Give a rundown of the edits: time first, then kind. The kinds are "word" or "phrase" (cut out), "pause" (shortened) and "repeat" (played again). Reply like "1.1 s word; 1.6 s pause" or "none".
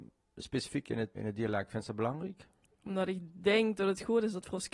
1.1 s word